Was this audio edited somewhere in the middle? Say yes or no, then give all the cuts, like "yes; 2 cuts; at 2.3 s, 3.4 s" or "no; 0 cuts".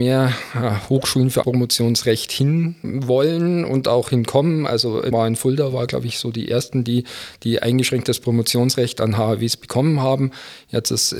yes; 2 cuts; at 1.4 s, 5.1 s